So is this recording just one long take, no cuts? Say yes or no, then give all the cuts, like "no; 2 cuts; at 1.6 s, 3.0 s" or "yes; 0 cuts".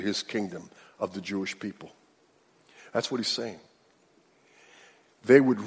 yes; 0 cuts